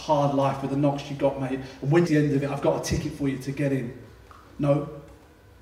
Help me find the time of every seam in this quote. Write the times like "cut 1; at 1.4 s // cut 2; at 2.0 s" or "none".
cut 1; at 2.1 s

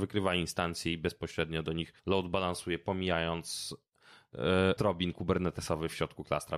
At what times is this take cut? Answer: cut 1; at 2.0 s // cut 2; at 4.8 s

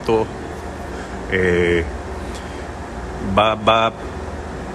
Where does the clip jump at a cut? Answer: none

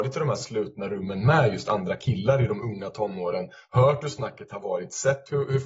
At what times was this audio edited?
none

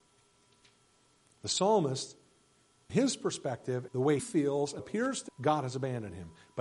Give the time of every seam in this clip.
cut 1; at 2.9 s // cut 2; at 3.9 s // cut 3; at 4.2 s // cut 4; at 4.8 s // cut 5; at 5.3 s

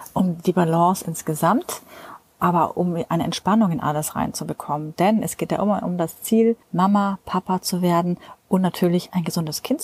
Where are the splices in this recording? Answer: cut 1; at 6.6 s

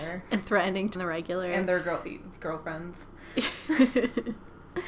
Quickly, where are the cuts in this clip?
cut 1; at 0.9 s

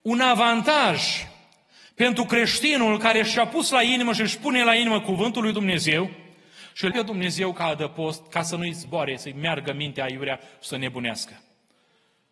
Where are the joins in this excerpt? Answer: cut 1; at 6.9 s

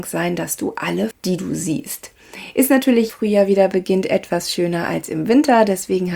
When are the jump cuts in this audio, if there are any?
cut 1; at 1.1 s // cut 2; at 3.1 s

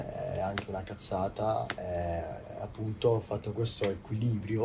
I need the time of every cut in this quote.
none

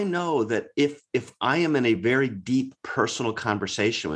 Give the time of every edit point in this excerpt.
none

